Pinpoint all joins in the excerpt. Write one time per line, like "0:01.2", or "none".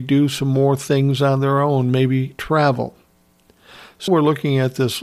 0:04.1